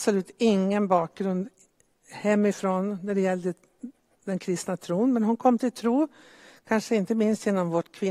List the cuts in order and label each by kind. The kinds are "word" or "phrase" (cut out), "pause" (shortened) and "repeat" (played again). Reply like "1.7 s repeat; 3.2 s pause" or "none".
none